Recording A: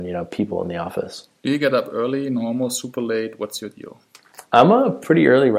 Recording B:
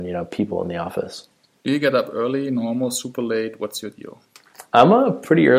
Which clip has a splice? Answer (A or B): A